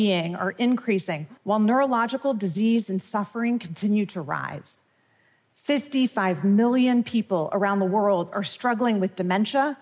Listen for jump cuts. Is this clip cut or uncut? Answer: cut